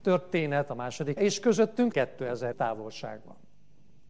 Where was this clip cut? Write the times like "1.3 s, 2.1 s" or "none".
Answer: 1.2 s, 1.9 s, 2.5 s